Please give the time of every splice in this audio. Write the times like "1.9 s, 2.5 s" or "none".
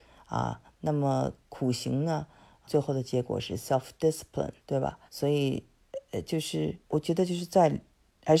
2.7 s, 4.6 s, 5.1 s, 6.8 s